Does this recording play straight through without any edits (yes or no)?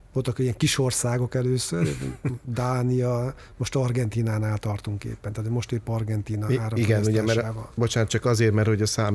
yes